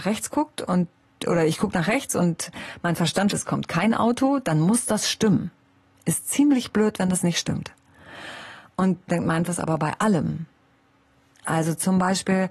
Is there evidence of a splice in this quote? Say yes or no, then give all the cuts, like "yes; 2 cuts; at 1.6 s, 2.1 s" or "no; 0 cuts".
yes; 3 cuts; at 3.3 s, 9.1 s, 9.5 s